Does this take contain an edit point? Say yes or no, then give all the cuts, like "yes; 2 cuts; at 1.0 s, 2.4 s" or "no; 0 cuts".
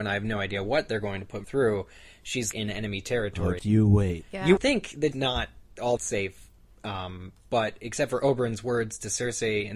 yes; 6 cuts; at 1.4 s, 2.5 s, 3.6 s, 4.6 s, 5.1 s, 6.0 s